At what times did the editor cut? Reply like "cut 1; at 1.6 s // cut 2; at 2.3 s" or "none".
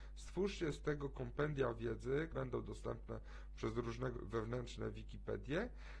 cut 1; at 2.3 s // cut 2; at 4.1 s